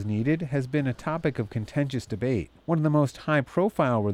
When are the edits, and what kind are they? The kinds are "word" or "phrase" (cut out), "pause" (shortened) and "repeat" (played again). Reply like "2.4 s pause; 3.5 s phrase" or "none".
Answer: 2.6 s pause